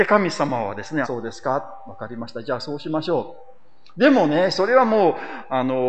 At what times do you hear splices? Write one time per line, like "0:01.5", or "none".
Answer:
0:01.0